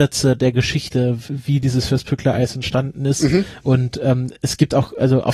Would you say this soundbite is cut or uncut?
uncut